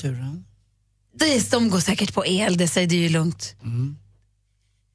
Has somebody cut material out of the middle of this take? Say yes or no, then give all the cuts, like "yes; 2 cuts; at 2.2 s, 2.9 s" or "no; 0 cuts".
no; 0 cuts